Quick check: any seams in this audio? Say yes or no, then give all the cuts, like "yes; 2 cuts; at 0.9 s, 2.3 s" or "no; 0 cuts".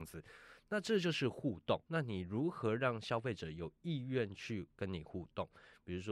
yes; 1 cut; at 1.8 s